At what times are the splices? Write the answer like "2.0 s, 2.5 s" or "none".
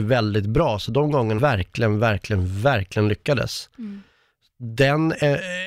1.4 s